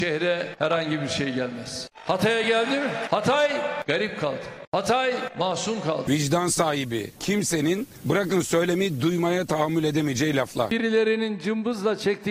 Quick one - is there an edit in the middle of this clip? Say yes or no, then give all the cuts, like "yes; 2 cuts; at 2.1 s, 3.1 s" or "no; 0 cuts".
no; 0 cuts